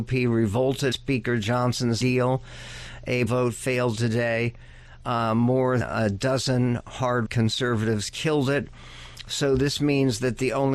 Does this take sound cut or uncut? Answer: cut